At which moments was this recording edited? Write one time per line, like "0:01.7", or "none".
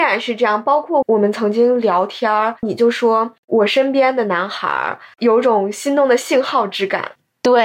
0:02.6